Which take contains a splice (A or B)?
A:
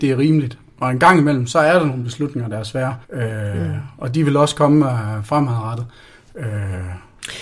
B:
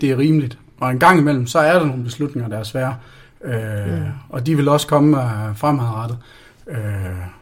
A